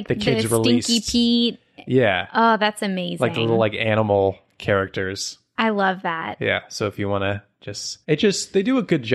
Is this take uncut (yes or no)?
no